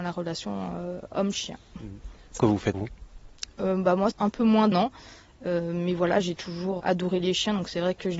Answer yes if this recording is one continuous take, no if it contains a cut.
no